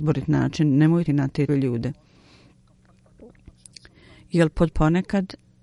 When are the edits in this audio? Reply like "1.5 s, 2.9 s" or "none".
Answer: 1.1 s, 1.5 s, 4.7 s